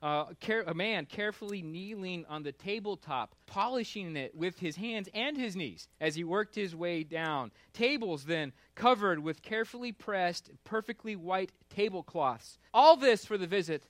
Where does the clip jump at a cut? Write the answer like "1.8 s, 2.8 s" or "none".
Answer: 3.4 s, 5.9 s, 12.7 s

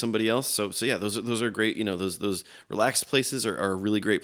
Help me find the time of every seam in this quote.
none

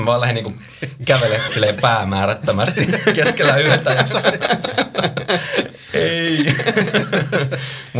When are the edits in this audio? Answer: 1.5 s

